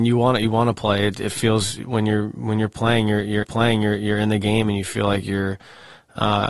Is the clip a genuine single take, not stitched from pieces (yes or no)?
no